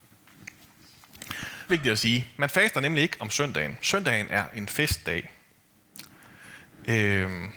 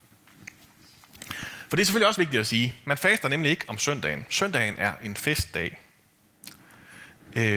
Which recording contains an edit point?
first; 1 cut; at 1.7 s

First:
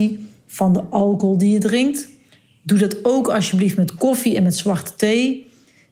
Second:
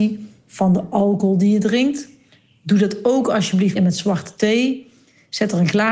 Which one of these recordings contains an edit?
second; 1 cut; at 3.8 s

